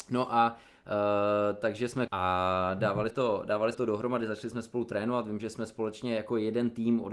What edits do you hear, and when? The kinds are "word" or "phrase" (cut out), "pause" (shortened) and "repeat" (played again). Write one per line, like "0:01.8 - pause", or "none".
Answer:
0:02.1 - phrase
0:03.1 - word
0:03.7 - word